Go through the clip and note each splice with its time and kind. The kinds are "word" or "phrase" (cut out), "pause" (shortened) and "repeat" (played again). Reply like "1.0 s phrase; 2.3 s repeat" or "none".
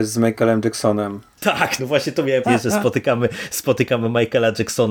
1.8 s word; 2.4 s word